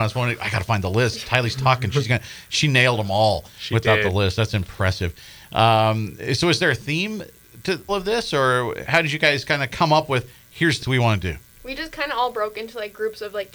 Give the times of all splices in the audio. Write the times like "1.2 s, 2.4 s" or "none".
7.9 s, 8.9 s, 10.8 s